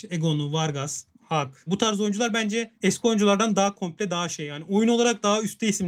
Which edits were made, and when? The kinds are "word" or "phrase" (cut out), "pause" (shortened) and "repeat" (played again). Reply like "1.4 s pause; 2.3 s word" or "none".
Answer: none